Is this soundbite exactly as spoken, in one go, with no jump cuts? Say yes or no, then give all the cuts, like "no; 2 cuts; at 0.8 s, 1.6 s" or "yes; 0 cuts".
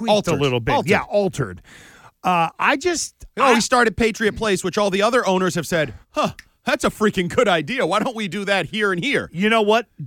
no; 2 cuts; at 6.0 s, 8.7 s